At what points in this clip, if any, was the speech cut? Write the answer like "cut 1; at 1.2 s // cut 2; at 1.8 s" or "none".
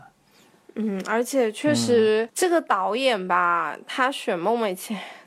cut 1; at 2.3 s